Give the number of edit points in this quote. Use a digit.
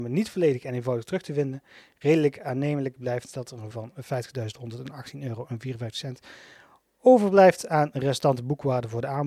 1